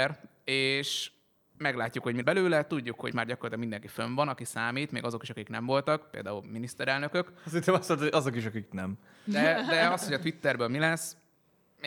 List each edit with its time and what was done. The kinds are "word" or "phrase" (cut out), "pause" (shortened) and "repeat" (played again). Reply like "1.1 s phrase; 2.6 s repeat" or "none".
2.2 s word; 3.1 s word